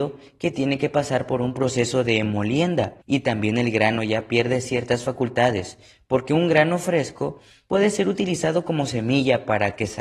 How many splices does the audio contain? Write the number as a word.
one